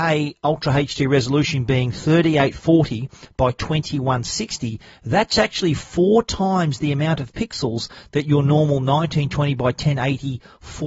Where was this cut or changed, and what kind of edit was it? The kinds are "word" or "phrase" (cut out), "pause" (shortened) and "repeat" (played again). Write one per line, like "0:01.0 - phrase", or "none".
none